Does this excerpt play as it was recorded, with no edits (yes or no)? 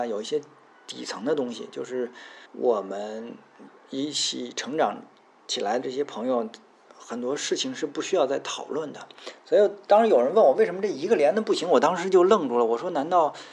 no